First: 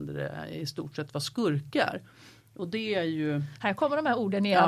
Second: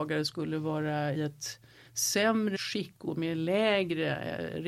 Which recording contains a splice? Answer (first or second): second